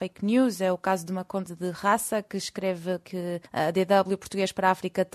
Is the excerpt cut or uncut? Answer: cut